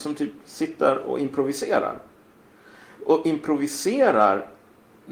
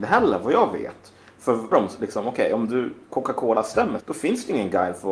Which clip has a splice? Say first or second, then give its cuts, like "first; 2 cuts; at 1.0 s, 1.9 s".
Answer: second; 2 cuts; at 1.7 s, 4.0 s